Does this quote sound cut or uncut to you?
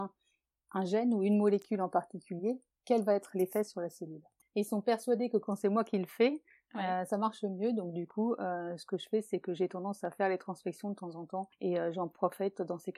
uncut